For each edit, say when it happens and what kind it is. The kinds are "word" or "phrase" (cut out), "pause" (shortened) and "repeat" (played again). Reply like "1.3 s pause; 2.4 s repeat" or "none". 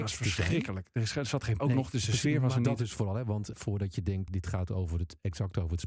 1.6 s phrase; 3.5 s word; 4.3 s word